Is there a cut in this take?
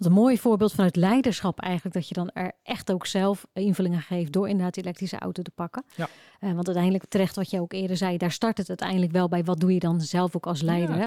no; 0 cuts

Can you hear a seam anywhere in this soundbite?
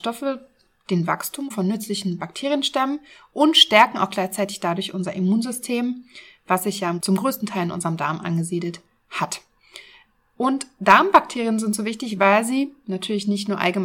no; 0 cuts

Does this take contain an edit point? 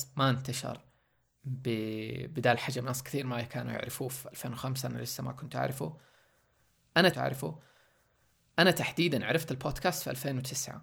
yes; 1 cut; at 7.1 s

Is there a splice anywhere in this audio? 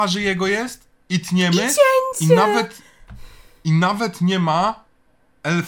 no; 0 cuts

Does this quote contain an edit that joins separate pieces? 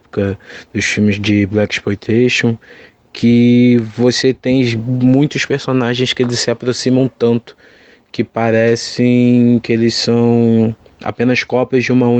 no; 0 cuts

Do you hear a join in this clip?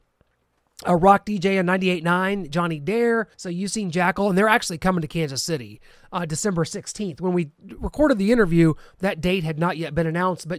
yes; 1 cut; at 3.3 s

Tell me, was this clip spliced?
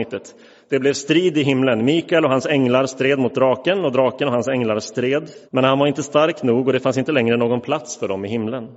yes; 1 cut; at 5.5 s

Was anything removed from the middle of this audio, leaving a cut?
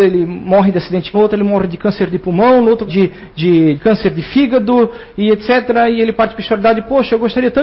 yes; 3 cuts; at 1.1 s, 2.9 s, 3.8 s

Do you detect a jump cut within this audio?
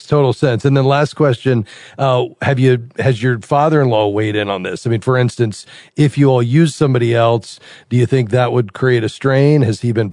no; 0 cuts

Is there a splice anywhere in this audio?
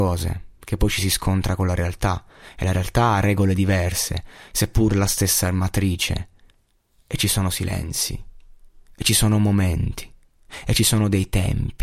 yes; 1 cut; at 6.5 s

